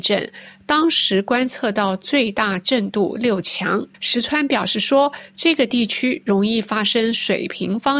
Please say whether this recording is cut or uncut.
cut